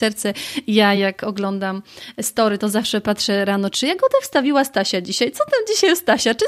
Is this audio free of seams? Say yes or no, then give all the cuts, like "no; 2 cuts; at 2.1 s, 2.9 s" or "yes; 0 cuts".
yes; 0 cuts